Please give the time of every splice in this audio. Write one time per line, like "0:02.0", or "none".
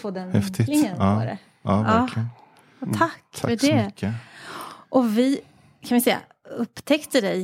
none